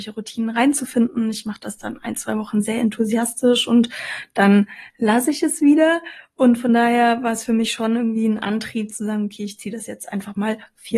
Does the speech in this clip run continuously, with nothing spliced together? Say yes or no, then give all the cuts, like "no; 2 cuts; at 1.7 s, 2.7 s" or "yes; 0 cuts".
yes; 0 cuts